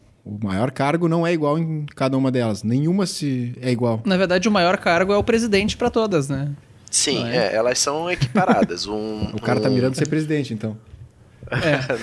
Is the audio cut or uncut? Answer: uncut